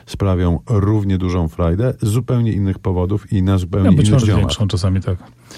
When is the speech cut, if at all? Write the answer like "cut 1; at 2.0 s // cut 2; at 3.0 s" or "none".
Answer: cut 1; at 4.2 s